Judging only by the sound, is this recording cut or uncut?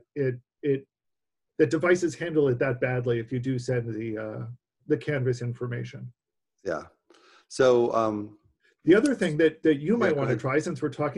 uncut